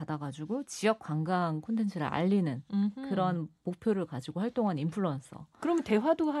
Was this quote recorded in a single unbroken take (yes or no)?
yes